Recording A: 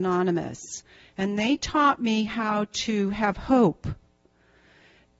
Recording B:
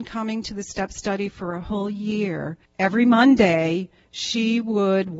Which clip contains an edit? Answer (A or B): B